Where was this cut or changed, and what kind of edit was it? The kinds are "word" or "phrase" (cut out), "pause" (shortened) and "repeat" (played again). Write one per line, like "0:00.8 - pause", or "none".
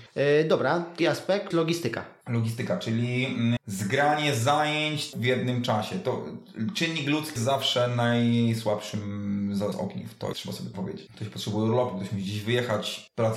0:01.0 - word
0:01.5 - word
0:03.6 - word
0:05.1 - word
0:07.4 - word
0:09.7 - word
0:10.3 - word
0:10.7 - word